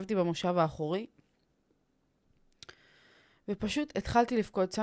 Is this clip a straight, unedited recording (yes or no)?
yes